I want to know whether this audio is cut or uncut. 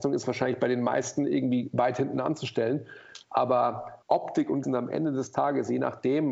cut